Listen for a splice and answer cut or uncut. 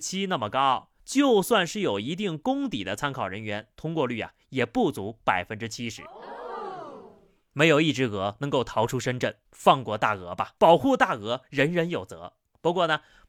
cut